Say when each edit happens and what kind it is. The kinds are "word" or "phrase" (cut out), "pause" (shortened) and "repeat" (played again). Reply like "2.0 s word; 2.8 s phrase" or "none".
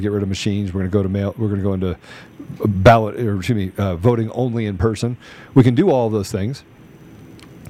none